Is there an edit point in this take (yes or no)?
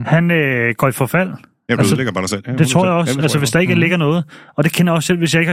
no